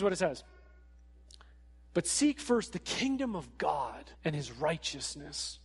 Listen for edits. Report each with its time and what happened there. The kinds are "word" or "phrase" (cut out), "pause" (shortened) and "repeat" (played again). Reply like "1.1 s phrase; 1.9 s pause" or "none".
4.1 s pause